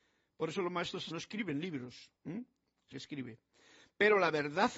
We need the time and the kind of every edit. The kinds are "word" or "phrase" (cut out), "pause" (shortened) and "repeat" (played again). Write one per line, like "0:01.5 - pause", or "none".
0:01.1 - word
0:02.2 - pause
0:02.9 - phrase